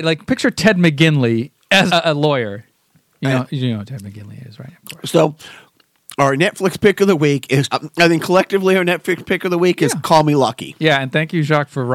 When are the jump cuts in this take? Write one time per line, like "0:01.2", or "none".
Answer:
0:01.9
0:07.7